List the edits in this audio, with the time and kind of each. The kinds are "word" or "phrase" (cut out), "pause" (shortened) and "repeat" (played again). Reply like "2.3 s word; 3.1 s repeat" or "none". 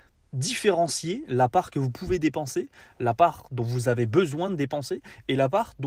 none